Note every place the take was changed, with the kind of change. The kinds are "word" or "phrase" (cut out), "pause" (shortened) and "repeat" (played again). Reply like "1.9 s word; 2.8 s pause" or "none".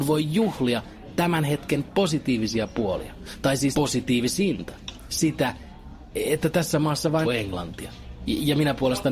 3.7 s word; 7.2 s phrase

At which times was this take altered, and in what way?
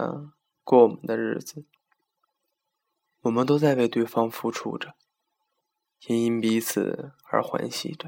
none

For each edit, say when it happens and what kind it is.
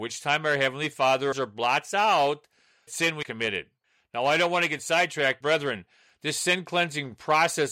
1.3 s word; 2.9 s word; 3.2 s word; 5.4 s word

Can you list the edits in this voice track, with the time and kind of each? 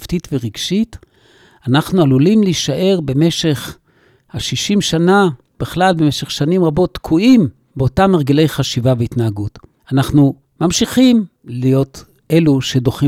none

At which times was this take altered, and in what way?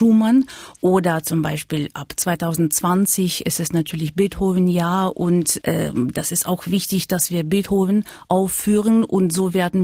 5.6 s word

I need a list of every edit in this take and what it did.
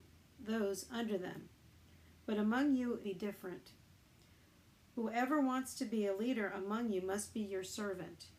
3.0 s phrase

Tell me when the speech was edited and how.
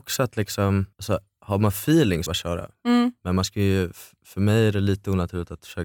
0.9 s pause; 2.3 s phrase

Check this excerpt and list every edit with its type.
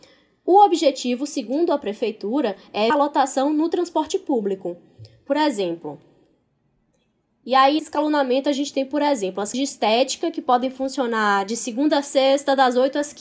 2.9 s word; 7.8 s word; 9.5 s word

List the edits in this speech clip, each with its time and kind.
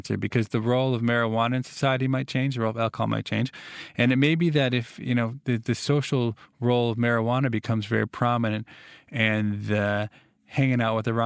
none

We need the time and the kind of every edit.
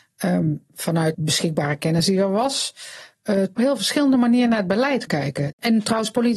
1.1 s word; 3.6 s phrase; 5.1 s word

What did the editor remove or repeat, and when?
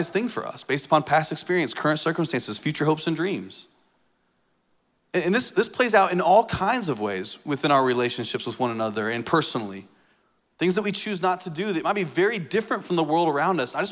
none

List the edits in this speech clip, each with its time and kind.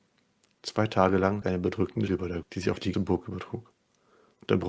1.4 s word; 2.1 s word; 2.4 s word; 2.9 s word

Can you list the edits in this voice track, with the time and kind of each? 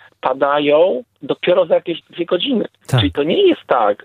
2.7 s pause

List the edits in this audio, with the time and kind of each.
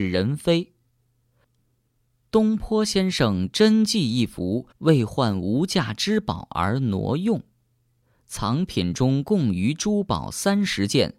4.7 s pause

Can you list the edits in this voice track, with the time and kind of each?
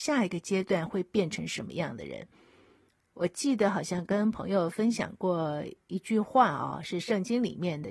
2.9 s pause

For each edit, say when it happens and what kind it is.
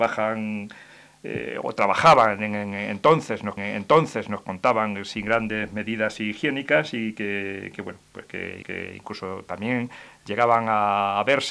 3.6 s repeat; 8.6 s repeat

